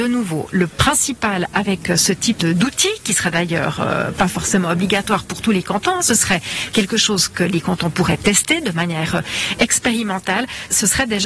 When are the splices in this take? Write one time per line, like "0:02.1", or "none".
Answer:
none